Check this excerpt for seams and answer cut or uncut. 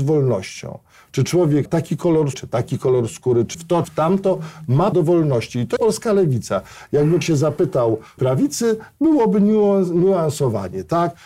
cut